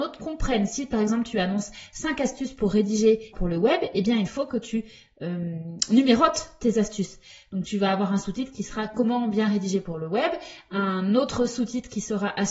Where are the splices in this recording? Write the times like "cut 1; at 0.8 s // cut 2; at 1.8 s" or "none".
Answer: cut 1; at 3.3 s